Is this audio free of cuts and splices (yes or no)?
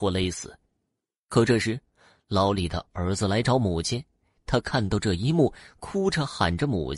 yes